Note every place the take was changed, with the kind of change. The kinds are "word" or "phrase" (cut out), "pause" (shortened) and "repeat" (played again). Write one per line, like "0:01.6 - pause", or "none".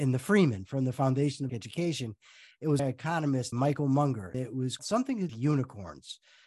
0:01.5 - word
0:02.8 - phrase
0:03.5 - word
0:04.3 - word
0:04.8 - word
0:05.3 - phrase